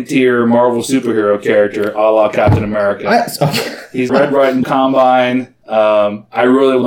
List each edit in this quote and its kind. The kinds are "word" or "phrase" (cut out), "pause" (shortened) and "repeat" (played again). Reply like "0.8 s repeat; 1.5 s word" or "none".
4.1 s phrase; 4.6 s word; 5.6 s pause